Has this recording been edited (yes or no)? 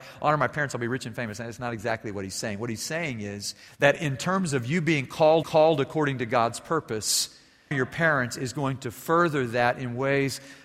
yes